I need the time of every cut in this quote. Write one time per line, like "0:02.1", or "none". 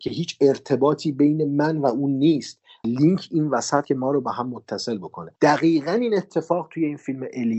0:02.8
0:03.8
0:05.4